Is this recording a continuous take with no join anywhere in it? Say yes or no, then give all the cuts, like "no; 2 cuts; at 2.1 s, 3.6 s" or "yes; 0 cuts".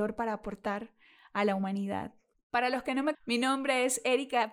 no; 2 cuts; at 2.3 s, 3.1 s